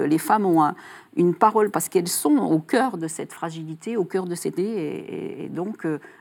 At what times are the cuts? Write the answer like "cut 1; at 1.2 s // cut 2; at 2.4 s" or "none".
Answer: cut 1; at 1.7 s // cut 2; at 4.6 s

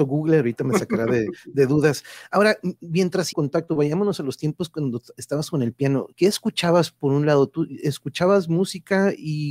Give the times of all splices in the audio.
cut 1; at 3.3 s // cut 2; at 6.1 s

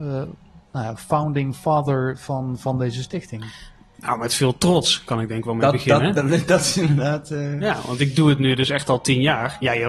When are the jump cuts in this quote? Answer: none

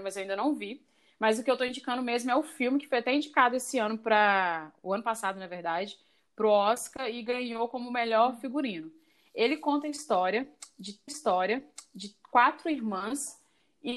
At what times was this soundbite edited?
cut 1; at 11.1 s

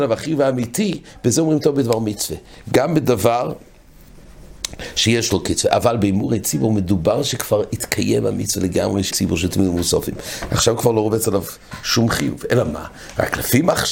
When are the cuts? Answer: cut 1; at 9.1 s

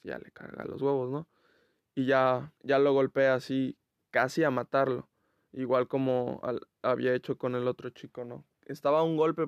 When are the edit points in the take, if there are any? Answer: cut 1; at 2.6 s

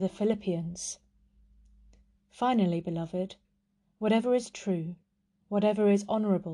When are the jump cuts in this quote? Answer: none

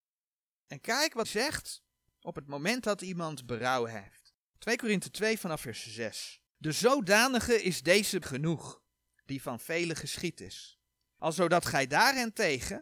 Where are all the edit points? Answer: cut 1; at 1.2 s // cut 2; at 4.5 s // cut 3; at 6.5 s // cut 4; at 8.2 s

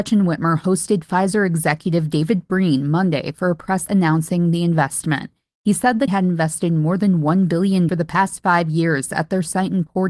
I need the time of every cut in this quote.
cut 1; at 3.9 s // cut 2; at 6.1 s // cut 3; at 7.9 s

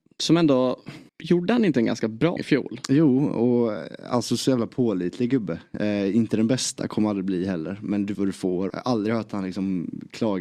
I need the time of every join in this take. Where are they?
cut 1; at 1.1 s // cut 2; at 2.4 s // cut 3; at 8.1 s // cut 4; at 8.7 s

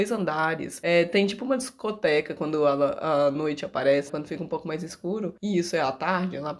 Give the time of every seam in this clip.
cut 1; at 4.1 s

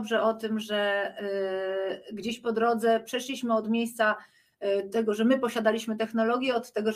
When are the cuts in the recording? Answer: none

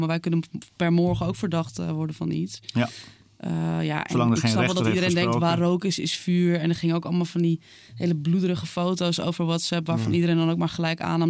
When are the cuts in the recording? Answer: none

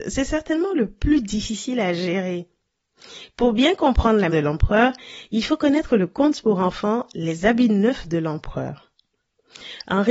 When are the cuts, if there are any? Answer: cut 1; at 4.3 s

